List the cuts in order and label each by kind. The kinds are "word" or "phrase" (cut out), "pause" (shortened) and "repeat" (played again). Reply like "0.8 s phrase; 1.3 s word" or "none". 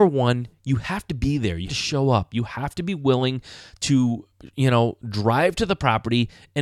1.7 s word

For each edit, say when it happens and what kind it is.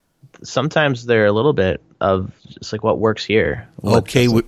none

